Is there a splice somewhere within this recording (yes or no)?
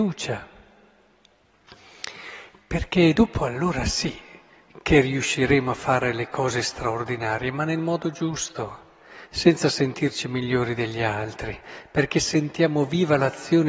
no